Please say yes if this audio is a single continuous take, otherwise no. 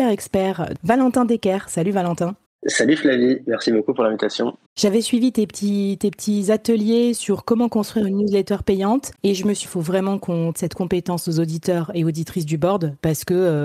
no